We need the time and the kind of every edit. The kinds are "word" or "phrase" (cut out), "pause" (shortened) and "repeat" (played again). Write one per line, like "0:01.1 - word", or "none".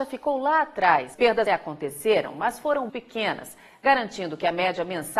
0:01.1 - word
0:01.5 - word
0:02.9 - word